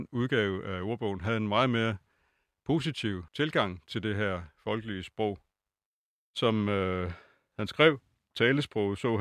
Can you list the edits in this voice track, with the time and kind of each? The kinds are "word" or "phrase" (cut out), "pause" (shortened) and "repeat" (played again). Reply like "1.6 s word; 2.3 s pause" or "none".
3.3 s pause